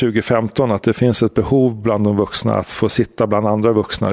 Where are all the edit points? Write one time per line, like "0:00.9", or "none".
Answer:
none